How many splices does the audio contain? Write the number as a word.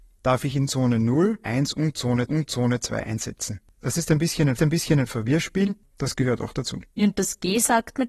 four